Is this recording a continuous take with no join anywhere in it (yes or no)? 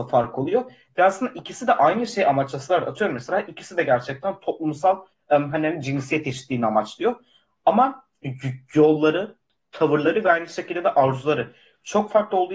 yes